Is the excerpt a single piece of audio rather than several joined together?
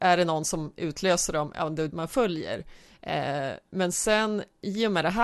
no; 1 cut; at 1.9 s

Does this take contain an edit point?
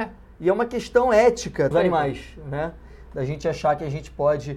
yes; 1 cut; at 1.7 s

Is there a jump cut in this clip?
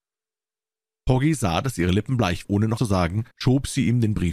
yes; 3 cuts; at 2.4 s, 2.8 s, 3.3 s

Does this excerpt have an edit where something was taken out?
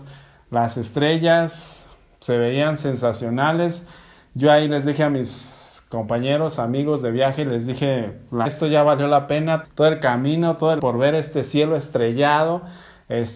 yes; 3 cuts; at 8.5 s, 9.6 s, 10.8 s

